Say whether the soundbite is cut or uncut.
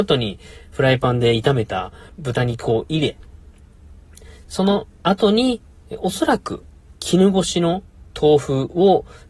cut